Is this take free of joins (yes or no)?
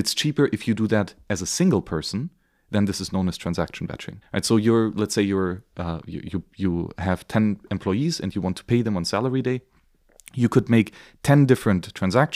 no